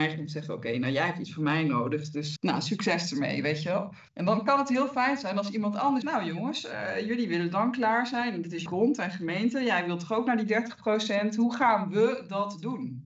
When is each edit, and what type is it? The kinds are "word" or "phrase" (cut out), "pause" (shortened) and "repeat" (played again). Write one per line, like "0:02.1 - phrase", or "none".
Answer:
0:02.4 - word
0:04.1 - pause
0:06.0 - word
0:08.7 - word